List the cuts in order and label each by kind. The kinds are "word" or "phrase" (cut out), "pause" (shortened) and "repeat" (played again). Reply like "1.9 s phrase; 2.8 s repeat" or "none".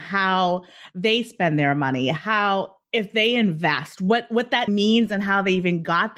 4.7 s word